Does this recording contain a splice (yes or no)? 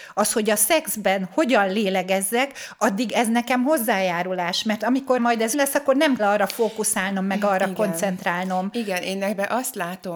yes